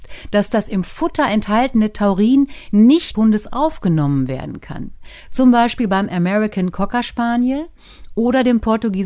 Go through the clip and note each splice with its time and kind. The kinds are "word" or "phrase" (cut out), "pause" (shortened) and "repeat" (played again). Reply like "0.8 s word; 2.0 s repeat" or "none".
3.1 s phrase